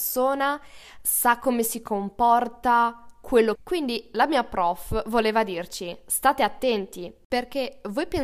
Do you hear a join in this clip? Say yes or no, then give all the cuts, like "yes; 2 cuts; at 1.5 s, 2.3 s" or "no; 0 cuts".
yes; 1 cut; at 3.6 s